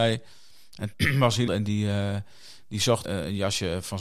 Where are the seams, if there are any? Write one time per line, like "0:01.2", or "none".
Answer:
0:00.9
0:01.5
0:03.0